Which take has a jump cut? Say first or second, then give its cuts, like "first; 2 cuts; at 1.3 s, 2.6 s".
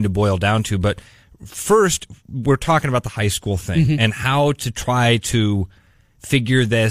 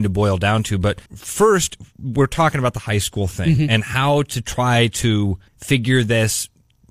second; 2 cuts; at 1.1 s, 5.5 s